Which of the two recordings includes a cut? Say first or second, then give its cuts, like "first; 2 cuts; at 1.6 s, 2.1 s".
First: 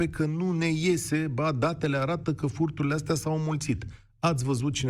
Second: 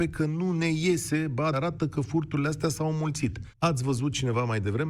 second; 2 cuts; at 1.5 s, 3.5 s